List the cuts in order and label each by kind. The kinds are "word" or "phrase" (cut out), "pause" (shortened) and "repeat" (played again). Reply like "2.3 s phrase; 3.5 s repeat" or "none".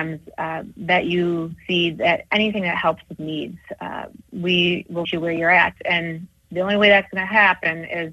1.6 s word; 3.2 s phrase; 5.0 s word